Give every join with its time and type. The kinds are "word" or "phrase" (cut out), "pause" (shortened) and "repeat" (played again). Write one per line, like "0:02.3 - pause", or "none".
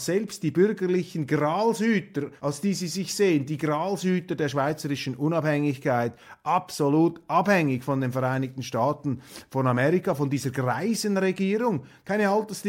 0:02.4 - pause